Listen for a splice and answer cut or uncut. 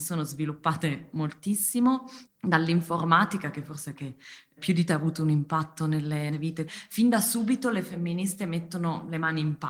cut